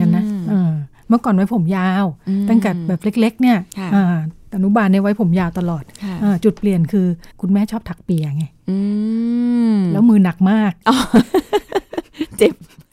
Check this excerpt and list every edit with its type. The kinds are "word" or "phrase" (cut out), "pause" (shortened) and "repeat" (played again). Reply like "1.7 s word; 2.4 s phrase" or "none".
7.3 s pause